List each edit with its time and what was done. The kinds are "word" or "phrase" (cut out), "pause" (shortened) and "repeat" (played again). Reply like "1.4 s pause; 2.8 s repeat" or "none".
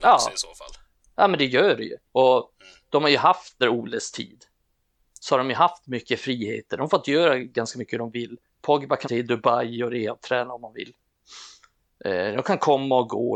2.1 s pause; 3.6 s phrase; 9.0 s word

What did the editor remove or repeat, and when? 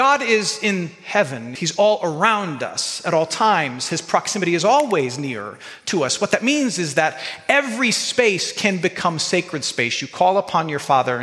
1.6 s word

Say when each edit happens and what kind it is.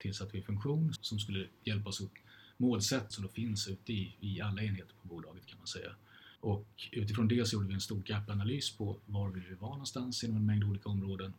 1.0 s word; 3.1 s phrase; 6.4 s pause

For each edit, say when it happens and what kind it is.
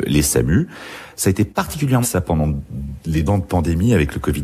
2.0 s word; 3.3 s word

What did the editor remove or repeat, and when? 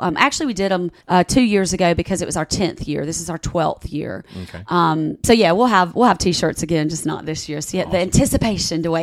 1.0 s pause

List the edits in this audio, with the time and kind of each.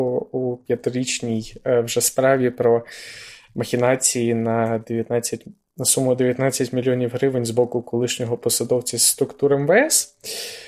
none

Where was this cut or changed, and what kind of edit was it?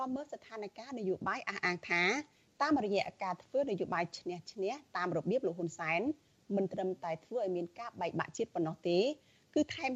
none

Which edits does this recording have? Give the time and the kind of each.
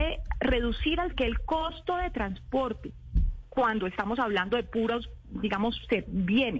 1.1 s phrase

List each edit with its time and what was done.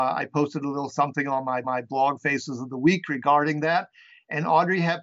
1.6 s repeat

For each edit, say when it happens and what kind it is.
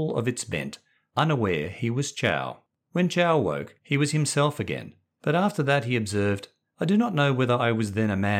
3.8 s pause

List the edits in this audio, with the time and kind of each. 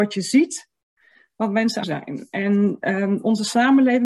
1.8 s phrase

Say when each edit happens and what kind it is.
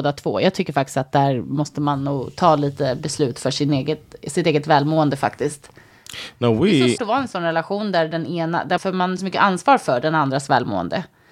7.0 s word; 8.8 s word; 9.2 s word

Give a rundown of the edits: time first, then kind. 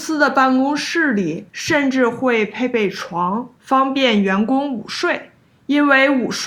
1.5 s pause; 3.6 s pause; 5.4 s pause

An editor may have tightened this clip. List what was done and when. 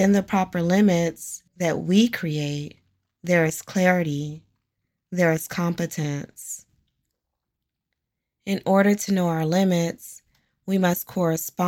1.5 s pause

